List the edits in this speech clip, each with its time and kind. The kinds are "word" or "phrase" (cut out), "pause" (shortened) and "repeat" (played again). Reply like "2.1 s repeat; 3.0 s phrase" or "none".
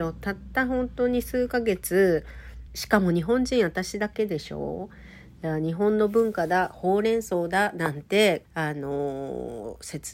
2.7 s word; 8.4 s phrase